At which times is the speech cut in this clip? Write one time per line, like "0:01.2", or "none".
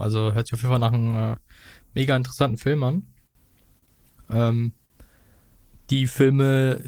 none

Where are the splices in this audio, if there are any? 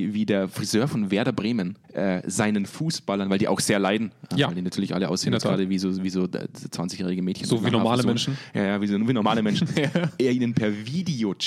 0:01.8

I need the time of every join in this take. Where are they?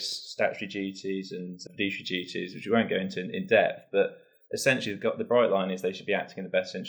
0:01.7

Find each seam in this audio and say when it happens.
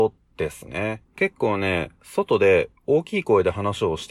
0:01.1

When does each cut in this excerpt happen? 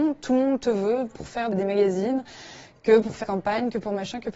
0:01.1
0:01.5
0:03.2

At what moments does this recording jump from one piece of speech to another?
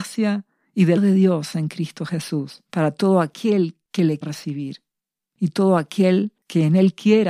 0:01.0
0:02.7
0:04.2

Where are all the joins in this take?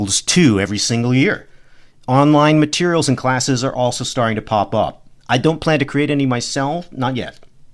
none

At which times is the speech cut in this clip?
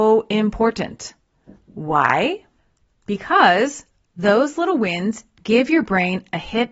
none

